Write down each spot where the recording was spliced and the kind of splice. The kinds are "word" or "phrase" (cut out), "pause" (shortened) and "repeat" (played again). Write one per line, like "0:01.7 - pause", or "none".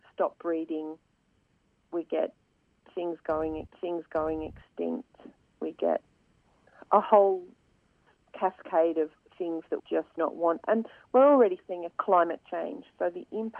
0:03.7 - repeat
0:09.8 - word
0:10.2 - word
0:11.9 - word